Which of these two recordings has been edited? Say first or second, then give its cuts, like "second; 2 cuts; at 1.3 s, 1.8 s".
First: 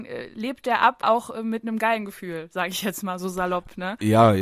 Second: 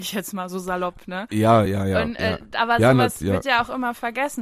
first; 1 cut; at 1.0 s